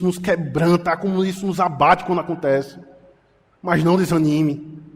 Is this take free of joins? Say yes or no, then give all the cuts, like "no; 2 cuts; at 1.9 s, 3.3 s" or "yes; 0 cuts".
yes; 0 cuts